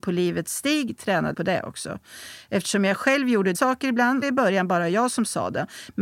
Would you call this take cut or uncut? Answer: cut